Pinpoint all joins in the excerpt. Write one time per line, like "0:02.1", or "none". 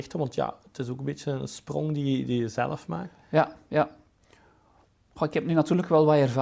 none